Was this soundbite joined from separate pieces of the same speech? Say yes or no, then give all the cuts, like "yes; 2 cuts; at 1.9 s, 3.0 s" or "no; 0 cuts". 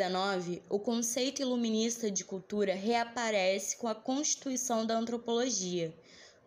no; 0 cuts